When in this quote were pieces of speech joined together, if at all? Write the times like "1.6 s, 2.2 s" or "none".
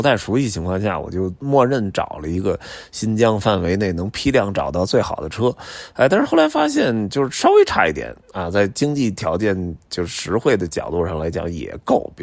none